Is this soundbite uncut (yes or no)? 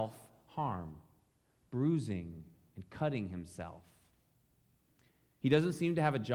yes